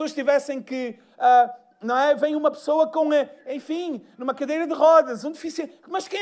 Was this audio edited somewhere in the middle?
no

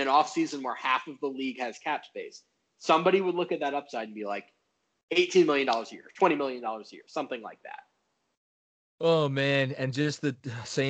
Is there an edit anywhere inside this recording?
no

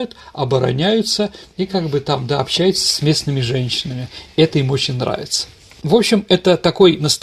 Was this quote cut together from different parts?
no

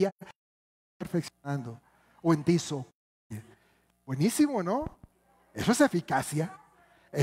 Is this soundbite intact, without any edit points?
yes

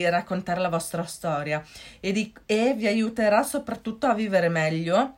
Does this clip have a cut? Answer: yes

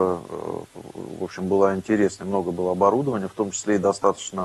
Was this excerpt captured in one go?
yes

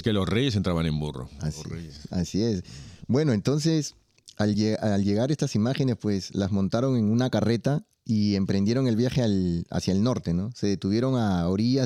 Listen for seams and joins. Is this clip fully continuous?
yes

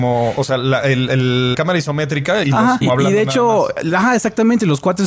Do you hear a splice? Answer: yes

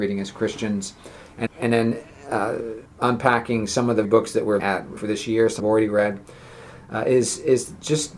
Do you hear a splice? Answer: yes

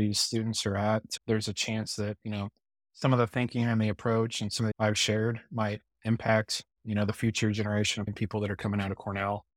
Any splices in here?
yes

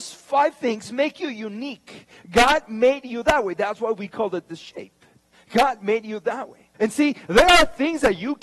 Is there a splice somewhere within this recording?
yes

